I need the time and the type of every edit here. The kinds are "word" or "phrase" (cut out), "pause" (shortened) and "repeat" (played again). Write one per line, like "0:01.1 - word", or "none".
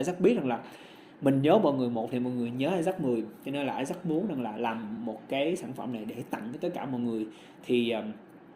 none

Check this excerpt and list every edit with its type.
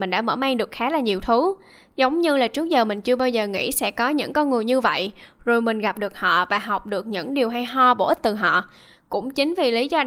none

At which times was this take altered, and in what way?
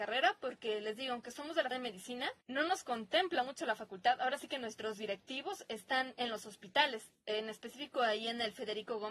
0:01.7 - word
0:02.4 - pause

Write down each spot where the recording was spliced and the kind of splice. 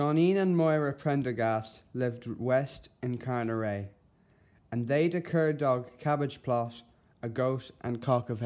none

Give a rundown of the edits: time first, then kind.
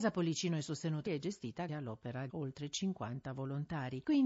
0:01.1 - phrase
0:01.7 - word
0:02.3 - word

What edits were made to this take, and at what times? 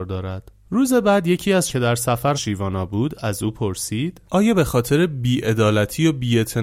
0:01.7 - word
0:02.3 - word

